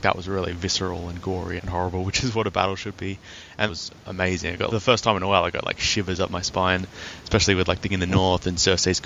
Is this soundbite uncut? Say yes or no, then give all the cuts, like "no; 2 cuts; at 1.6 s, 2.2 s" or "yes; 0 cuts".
no; 4 cuts; at 1.6 s, 3.7 s, 4.7 s, 7.9 s